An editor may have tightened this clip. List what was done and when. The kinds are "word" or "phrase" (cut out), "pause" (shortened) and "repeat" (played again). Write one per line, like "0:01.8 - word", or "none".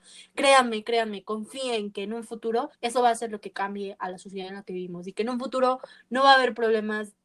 0:02.7 - pause